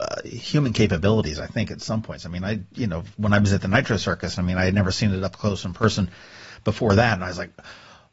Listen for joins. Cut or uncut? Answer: uncut